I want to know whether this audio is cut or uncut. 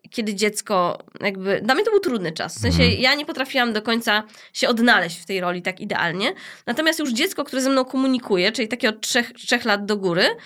uncut